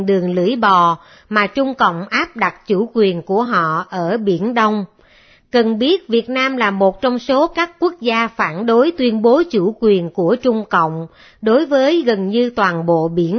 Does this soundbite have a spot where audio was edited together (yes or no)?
no